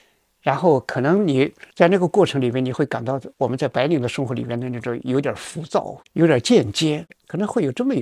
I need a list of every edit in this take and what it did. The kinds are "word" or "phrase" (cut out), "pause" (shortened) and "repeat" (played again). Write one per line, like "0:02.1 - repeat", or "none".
0:01.7 - pause
0:03.3 - pause
0:06.1 - pause

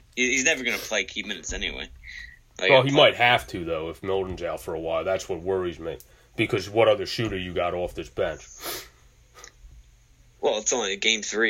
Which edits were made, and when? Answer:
none

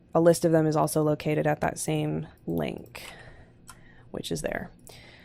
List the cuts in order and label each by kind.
0:02.4 - pause

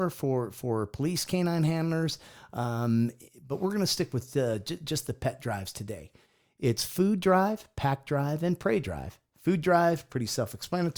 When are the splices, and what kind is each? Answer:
none

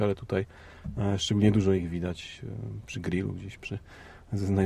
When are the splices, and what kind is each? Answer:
none

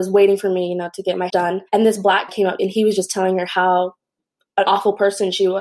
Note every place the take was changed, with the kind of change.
0:01.3 - word
0:01.7 - pause
0:02.3 - word
0:02.6 - phrase
0:04.6 - phrase

